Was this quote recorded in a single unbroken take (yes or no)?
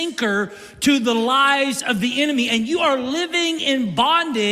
yes